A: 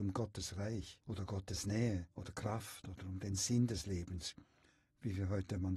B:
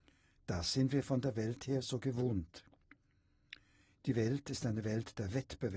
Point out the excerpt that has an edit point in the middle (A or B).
A